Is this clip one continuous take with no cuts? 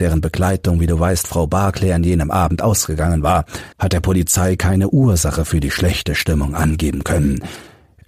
no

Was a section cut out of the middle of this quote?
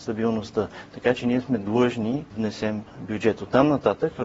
yes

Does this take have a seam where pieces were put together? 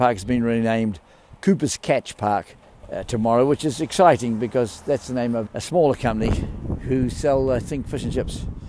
yes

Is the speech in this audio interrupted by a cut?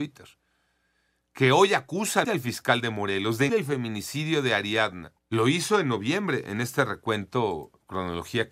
yes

